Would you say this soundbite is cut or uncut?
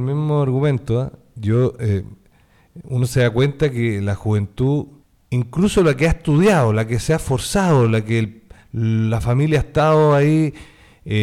cut